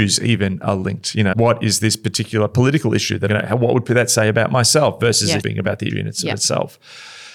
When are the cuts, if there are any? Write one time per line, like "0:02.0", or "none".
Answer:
0:01.3
0:03.3
0:05.4
0:05.9